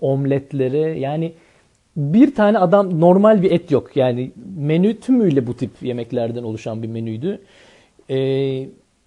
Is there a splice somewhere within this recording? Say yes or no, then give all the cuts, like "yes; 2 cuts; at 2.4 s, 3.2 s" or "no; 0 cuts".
no; 0 cuts